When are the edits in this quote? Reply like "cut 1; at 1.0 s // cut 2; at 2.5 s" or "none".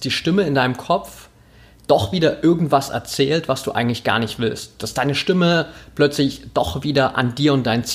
none